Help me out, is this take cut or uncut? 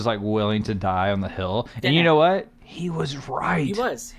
uncut